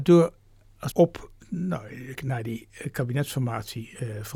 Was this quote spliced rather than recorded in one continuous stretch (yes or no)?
yes